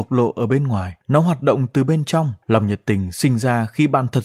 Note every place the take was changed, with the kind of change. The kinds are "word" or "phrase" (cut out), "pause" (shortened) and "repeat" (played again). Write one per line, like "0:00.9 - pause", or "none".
0:01.0 - pause
0:02.4 - pause